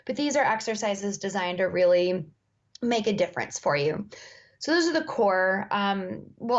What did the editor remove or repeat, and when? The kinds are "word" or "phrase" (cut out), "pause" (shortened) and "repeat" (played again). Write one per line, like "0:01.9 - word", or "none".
none